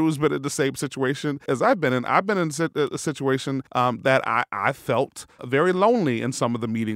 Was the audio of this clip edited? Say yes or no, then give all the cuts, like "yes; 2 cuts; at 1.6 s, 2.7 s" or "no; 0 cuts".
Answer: yes; 3 cuts; at 1.5 s, 3.7 s, 5.4 s